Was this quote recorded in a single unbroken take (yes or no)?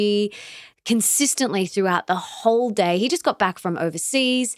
yes